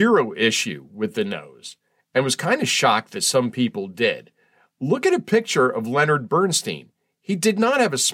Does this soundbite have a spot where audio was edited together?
no; 0 cuts

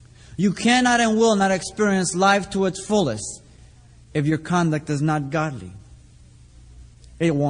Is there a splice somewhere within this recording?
no; 0 cuts

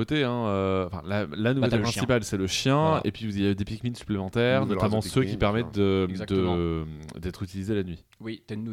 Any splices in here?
no; 0 cuts

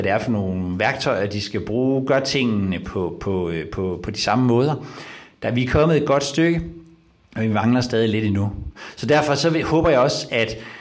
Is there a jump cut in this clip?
no; 0 cuts

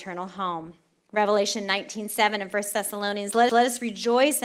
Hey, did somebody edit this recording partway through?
yes; 1 cut; at 3.5 s

